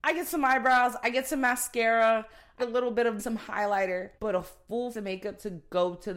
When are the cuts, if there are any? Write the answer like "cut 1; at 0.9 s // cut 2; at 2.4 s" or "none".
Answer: cut 1; at 2.6 s // cut 2; at 3.2 s // cut 3; at 4.2 s // cut 4; at 4.9 s